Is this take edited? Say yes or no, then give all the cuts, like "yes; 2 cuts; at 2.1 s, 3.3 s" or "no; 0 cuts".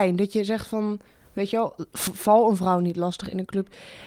no; 0 cuts